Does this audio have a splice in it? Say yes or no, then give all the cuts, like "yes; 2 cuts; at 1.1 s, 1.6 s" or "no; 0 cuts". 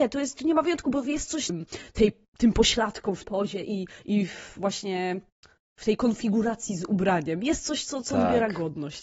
yes; 3 cuts; at 1.5 s, 3.2 s, 5.6 s